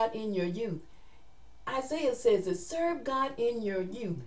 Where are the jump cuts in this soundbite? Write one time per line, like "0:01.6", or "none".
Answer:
none